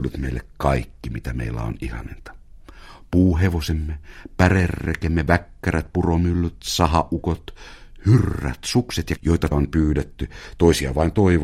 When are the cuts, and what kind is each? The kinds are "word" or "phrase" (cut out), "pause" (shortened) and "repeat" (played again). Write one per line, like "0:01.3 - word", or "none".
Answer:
0:09.2 - word
0:09.5 - word

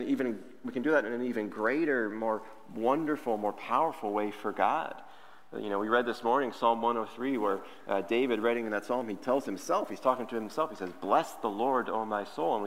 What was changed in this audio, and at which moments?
none

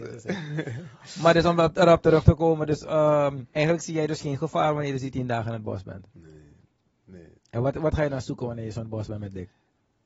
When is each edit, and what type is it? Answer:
0:03.5 - pause
0:07.4 - pause

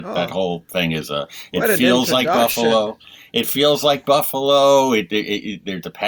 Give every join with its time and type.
none

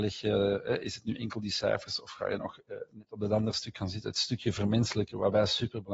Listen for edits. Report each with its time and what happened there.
none

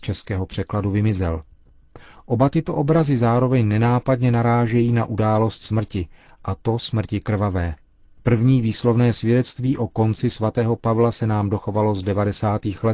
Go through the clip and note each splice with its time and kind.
none

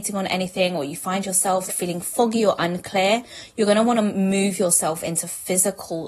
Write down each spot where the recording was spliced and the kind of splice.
0:01.7 - word

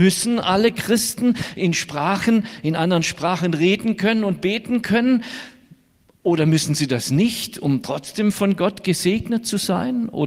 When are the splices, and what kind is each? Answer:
none

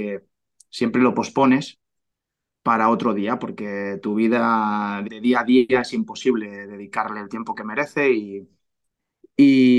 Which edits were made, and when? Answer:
0:05.0 - word

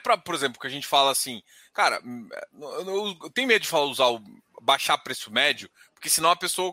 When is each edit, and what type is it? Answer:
none

